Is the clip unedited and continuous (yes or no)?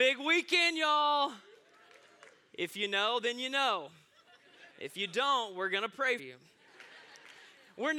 no